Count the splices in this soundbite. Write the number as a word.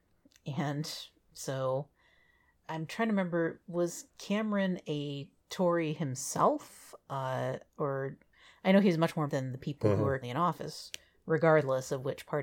six